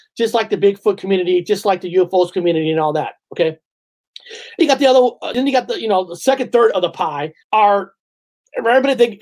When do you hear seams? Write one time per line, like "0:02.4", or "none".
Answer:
0:04.6
0:07.4